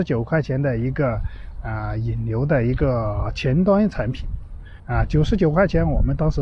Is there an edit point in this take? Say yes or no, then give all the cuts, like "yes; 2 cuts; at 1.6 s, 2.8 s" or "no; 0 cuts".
yes; 1 cut; at 4.8 s